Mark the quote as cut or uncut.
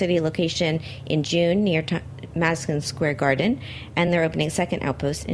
uncut